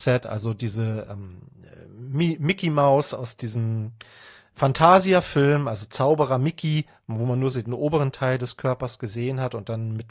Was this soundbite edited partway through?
no; 0 cuts

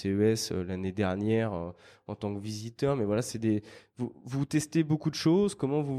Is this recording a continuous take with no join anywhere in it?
yes; 0 cuts

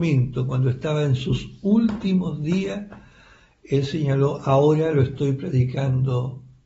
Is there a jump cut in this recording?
no; 0 cuts

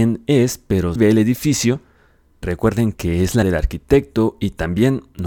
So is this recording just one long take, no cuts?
no; 4 cuts; at 1.0 s, 2.4 s, 2.9 s, 3.4 s

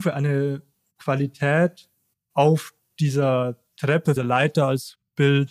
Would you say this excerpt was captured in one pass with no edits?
no; 2 cuts; at 2.8 s, 4.2 s

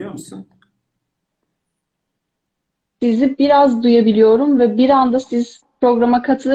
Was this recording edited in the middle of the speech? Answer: no; 0 cuts

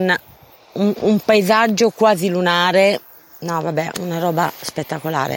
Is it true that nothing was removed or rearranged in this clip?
no; 1 cut; at 1.0 s

